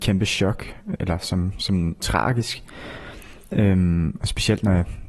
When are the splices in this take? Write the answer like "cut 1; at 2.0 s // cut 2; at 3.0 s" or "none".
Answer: cut 1; at 1.0 s // cut 2; at 2.0 s